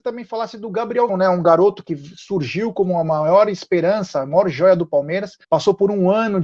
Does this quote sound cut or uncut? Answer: cut